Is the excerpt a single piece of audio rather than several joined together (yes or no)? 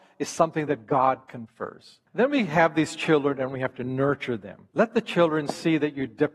no